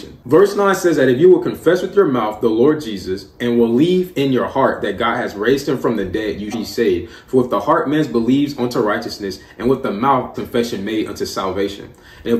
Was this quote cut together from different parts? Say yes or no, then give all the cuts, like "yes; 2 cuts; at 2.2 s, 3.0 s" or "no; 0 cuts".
yes; 2 cuts; at 6.5 s, 10.3 s